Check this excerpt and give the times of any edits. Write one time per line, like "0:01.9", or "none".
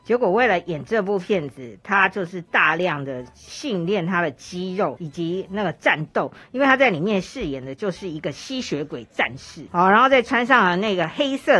0:05.0
0:09.7